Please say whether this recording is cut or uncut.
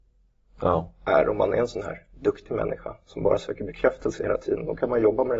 uncut